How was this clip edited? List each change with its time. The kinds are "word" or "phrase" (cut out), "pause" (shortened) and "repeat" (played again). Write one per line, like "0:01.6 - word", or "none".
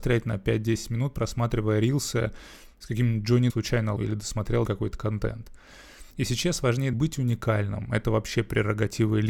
0:03.5 - phrase
0:04.0 - word
0:04.6 - phrase
0:06.1 - pause
0:06.9 - phrase